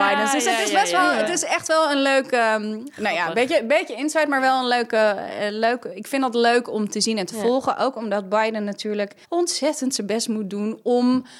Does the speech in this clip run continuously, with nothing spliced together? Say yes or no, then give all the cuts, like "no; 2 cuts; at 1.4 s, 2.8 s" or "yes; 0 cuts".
no; 1 cut; at 9.2 s